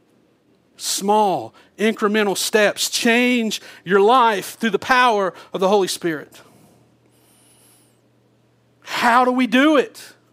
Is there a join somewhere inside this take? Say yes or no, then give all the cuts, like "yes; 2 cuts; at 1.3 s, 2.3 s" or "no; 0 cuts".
no; 0 cuts